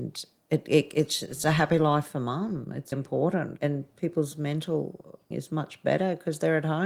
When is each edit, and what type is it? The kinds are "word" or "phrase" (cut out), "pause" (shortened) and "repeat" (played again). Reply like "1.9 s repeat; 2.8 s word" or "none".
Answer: 2.9 s word; 3.6 s word; 5.3 s word